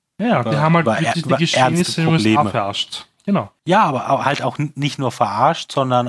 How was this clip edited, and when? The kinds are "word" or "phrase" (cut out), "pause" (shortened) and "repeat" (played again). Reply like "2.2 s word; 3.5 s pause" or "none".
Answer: 3.6 s pause